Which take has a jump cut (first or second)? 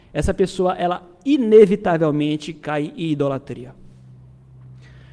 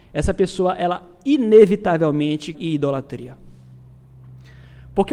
second